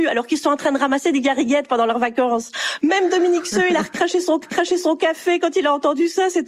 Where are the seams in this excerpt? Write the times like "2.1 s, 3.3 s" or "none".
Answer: 4.4 s